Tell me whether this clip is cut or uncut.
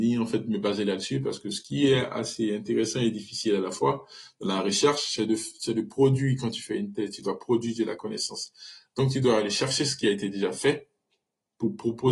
uncut